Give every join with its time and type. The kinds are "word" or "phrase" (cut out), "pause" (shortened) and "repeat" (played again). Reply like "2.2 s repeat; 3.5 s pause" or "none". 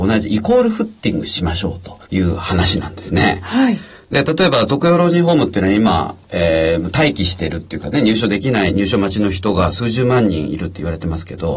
2.0 s pause